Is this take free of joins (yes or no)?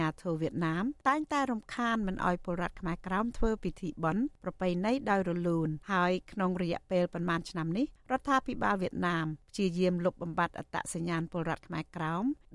no